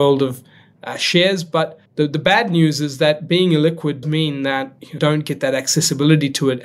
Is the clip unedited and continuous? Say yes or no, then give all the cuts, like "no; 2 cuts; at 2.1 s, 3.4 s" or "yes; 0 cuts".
no; 3 cuts; at 1.9 s, 4.0 s, 5.0 s